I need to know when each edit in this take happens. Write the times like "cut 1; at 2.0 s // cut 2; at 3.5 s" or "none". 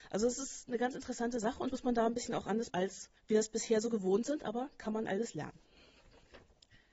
cut 1; at 1.7 s // cut 2; at 2.7 s // cut 3; at 3.2 s